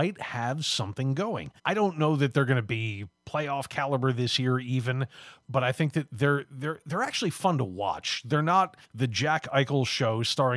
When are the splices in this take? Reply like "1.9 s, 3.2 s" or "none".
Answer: 1.6 s, 8.8 s